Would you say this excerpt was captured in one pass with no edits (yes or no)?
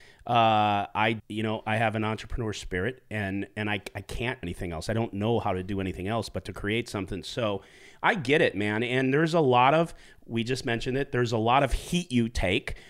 no